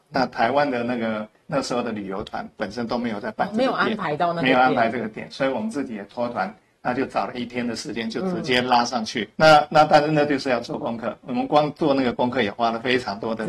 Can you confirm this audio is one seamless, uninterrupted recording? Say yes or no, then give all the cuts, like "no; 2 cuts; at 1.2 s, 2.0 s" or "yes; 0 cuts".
no; 1 cut; at 9.3 s